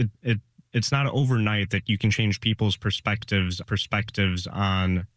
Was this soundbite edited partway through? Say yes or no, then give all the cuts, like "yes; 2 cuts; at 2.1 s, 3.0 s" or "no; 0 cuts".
yes; 1 cut; at 3.6 s